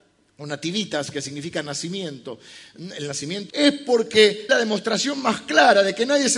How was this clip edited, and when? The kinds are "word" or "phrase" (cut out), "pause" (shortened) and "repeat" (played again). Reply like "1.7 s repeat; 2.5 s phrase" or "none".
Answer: 3.5 s phrase; 4.5 s word